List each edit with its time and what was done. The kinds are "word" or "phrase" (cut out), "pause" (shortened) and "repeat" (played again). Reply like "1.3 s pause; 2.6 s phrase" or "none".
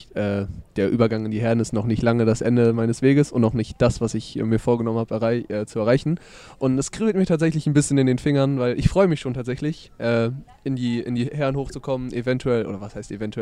none